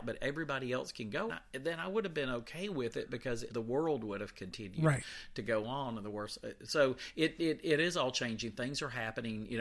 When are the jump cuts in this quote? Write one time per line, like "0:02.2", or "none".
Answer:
0:01.3
0:03.5